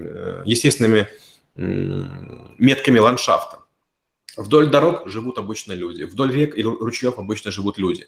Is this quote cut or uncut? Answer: uncut